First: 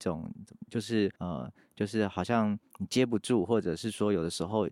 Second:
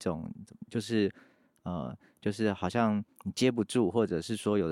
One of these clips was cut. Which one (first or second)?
first